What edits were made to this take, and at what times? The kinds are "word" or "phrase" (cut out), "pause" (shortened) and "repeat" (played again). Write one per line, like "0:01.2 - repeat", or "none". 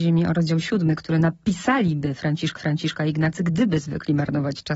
0:02.6 - repeat